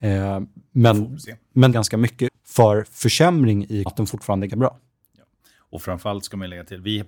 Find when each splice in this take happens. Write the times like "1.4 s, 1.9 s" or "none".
1.7 s, 2.3 s, 3.9 s, 4.5 s

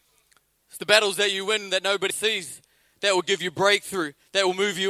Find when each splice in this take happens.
2.1 s

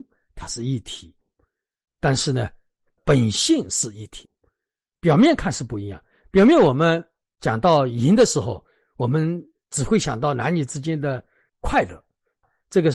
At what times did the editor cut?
none

